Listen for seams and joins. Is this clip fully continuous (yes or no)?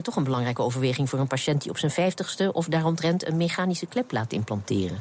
yes